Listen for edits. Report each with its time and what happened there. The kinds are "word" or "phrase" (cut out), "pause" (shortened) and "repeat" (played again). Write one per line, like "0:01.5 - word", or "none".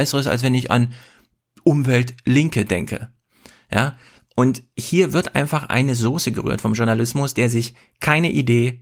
none